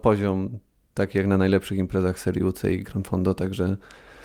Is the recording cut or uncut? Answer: uncut